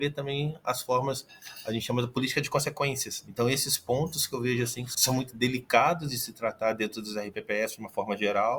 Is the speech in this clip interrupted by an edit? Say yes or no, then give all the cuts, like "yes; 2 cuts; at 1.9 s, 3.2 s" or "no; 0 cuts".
no; 0 cuts